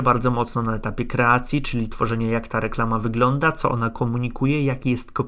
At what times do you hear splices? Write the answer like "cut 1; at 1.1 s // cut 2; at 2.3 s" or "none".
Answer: none